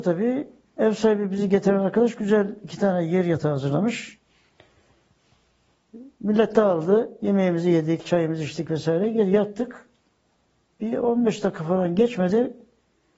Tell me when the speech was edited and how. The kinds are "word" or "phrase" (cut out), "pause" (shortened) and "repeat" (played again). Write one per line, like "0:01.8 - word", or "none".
none